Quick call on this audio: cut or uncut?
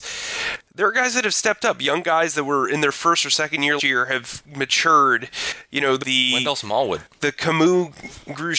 cut